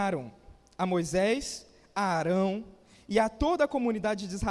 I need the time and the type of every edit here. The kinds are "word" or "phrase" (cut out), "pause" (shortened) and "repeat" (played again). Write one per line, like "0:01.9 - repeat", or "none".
none